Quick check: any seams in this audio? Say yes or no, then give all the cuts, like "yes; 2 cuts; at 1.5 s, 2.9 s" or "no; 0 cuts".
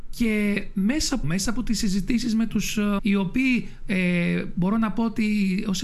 yes; 2 cuts; at 1.2 s, 3.0 s